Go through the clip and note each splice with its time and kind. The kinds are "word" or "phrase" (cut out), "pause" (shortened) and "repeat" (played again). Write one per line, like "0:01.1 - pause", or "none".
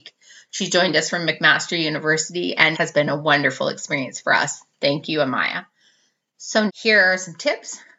0:02.7 - word
0:06.7 - word